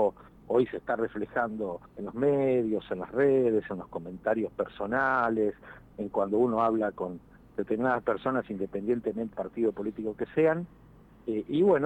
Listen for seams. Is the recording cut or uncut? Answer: cut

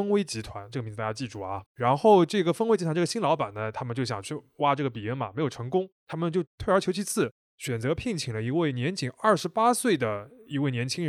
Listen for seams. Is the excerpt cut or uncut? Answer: cut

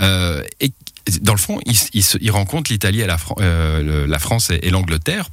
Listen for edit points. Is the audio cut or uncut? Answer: uncut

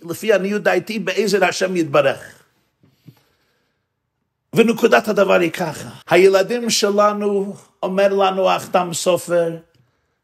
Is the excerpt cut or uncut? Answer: cut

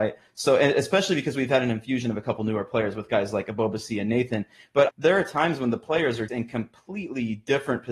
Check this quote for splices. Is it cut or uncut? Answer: cut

